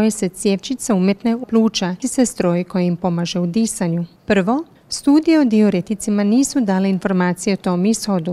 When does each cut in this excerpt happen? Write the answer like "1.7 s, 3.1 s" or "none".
1.4 s, 2.0 s, 4.2 s